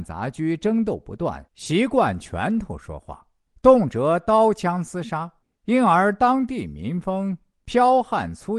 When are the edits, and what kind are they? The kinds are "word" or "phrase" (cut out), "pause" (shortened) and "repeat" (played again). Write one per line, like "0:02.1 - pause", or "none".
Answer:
0:01.5 - pause
0:03.5 - pause
0:05.4 - pause